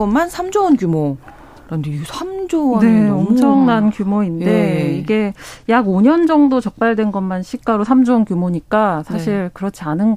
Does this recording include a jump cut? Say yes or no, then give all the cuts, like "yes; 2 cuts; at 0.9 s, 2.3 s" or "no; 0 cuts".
no; 0 cuts